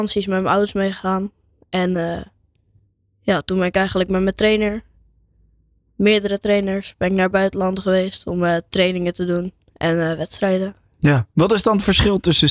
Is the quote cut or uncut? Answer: uncut